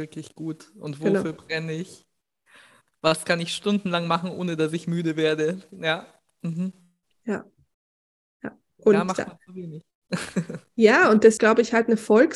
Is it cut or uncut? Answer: cut